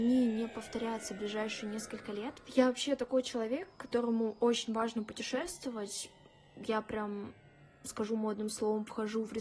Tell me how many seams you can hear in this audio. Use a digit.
0